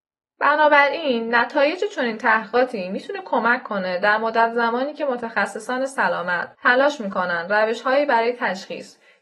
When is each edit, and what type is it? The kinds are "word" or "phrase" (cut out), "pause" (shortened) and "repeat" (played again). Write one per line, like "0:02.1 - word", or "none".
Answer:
0:06.5 - pause